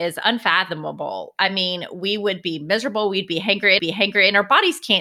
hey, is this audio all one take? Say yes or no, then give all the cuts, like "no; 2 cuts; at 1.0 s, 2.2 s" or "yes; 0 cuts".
no; 1 cut; at 3.8 s